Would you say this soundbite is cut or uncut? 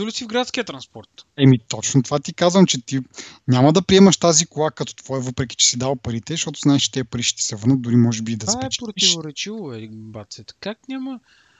uncut